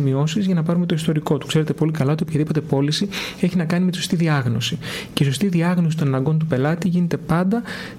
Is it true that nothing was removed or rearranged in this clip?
yes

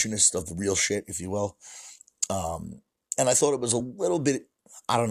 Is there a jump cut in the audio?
no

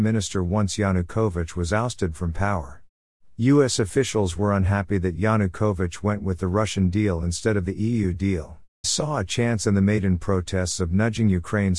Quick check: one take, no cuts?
no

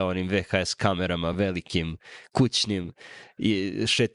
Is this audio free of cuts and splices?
yes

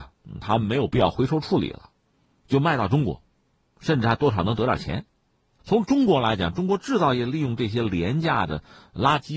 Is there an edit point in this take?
no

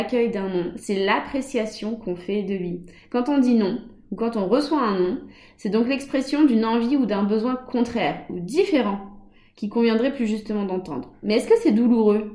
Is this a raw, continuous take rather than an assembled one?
yes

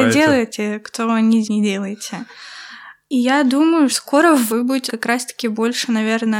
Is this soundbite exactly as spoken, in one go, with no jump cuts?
no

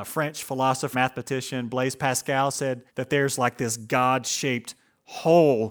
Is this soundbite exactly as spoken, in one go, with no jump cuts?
no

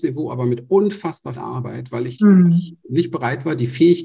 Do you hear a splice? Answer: yes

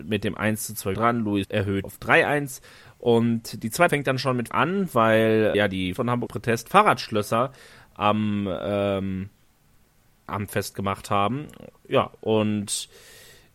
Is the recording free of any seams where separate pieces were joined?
no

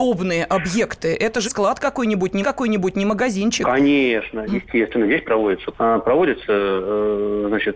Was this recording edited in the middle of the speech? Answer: yes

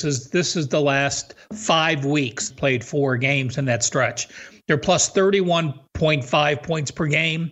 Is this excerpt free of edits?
no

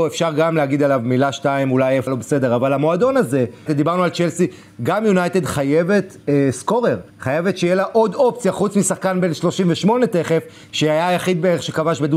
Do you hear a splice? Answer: yes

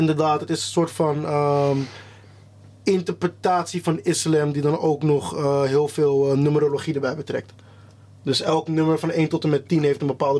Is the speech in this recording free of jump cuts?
yes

